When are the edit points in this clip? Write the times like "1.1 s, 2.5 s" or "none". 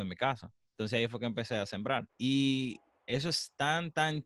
2.1 s